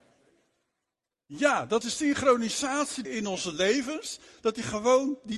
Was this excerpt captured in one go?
no; 2 cuts; at 1.8 s, 3.0 s

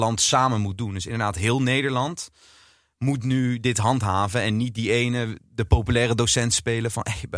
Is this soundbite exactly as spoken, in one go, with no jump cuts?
yes; 0 cuts

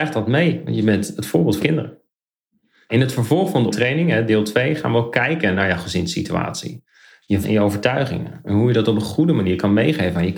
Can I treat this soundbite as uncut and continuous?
no; 3 cuts; at 1.6 s, 3.7 s, 7.4 s

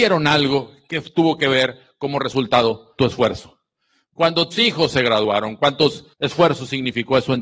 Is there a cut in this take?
yes; 3 cuts; at 3.0 s, 4.5 s, 6.1 s

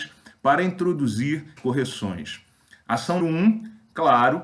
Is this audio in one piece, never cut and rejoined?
no; 2 cuts; at 1.6 s, 3.2 s

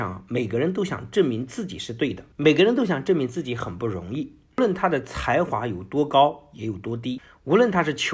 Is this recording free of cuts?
no; 1 cut; at 2.3 s

